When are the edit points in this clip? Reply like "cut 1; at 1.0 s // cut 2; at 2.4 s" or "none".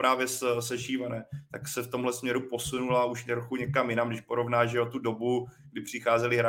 none